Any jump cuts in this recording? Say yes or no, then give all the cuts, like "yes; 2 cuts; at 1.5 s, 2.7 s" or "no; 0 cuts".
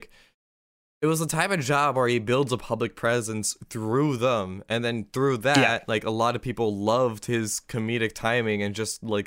no; 0 cuts